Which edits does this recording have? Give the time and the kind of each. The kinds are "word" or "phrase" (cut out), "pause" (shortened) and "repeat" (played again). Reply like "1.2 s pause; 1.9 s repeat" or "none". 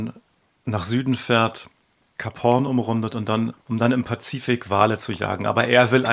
3.6 s pause